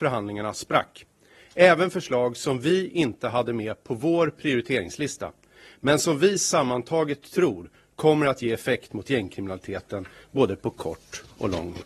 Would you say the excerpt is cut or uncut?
uncut